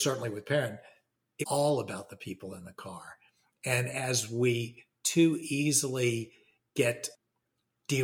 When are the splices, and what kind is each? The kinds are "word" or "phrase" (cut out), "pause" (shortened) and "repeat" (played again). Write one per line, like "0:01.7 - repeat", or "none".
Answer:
0:01.4 - word